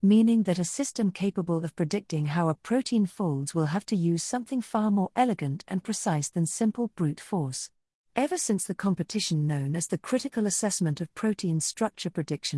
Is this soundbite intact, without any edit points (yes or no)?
yes